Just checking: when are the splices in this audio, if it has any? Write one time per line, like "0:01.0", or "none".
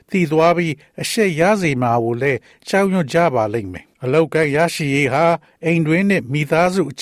0:03.9